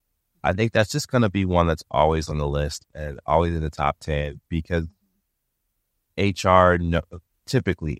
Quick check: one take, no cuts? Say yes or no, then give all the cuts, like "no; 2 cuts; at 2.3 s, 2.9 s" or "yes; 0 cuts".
yes; 0 cuts